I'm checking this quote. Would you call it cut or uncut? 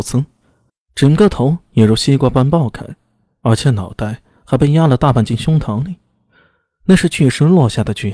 uncut